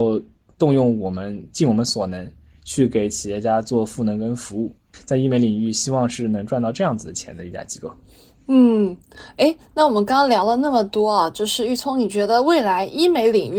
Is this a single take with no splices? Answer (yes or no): yes